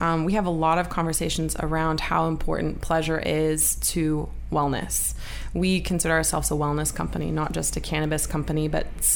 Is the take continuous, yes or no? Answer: yes